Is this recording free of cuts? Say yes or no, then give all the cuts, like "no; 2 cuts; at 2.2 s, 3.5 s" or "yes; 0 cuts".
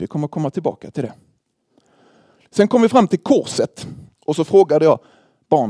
yes; 0 cuts